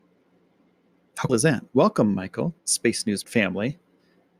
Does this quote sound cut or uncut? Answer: cut